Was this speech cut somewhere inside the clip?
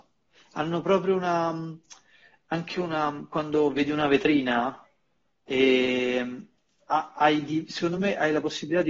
no; 0 cuts

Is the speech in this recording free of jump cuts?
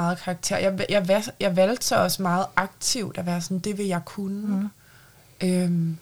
yes; 0 cuts

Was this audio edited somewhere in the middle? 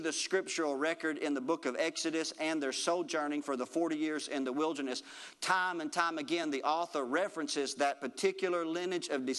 no; 0 cuts

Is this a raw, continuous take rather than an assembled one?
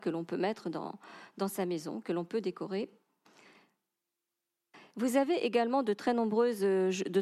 yes; 0 cuts

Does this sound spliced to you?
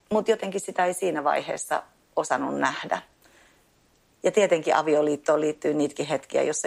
no; 0 cuts

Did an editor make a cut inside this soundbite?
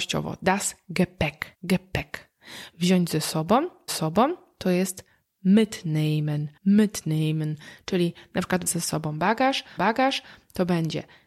yes; 5 cuts; at 1.5 s, 3.9 s, 6.6 s, 8.7 s, 9.8 s

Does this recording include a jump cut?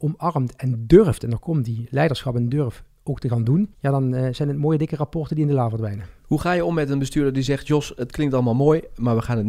yes; 1 cut; at 3.7 s

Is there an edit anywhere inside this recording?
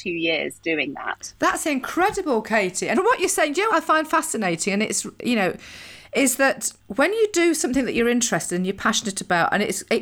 yes; 3 cuts; at 2.9 s, 3.7 s, 6.8 s

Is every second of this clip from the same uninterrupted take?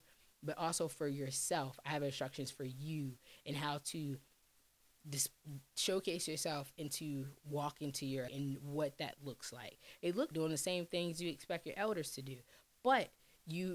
no; 3 cuts; at 5.0 s, 8.3 s, 10.3 s

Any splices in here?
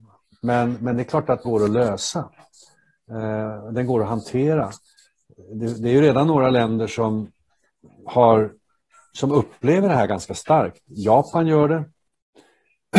yes; 1 cut; at 1.4 s

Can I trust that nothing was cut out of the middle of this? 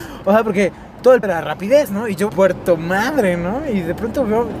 no; 2 cuts; at 1.2 s, 2.3 s

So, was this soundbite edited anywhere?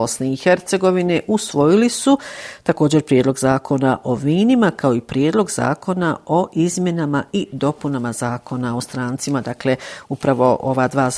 no; 0 cuts

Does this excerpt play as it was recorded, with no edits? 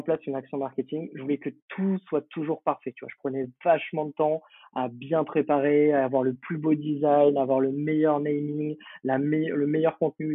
yes; 0 cuts

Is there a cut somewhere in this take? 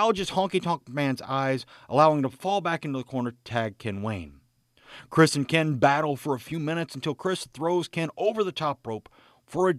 no; 0 cuts

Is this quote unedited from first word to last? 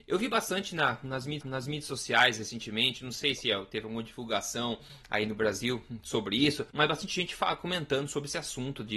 no; 2 cuts; at 1.4 s, 6.7 s

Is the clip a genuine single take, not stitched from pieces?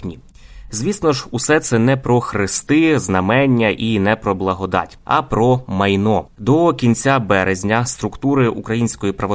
yes; 0 cuts

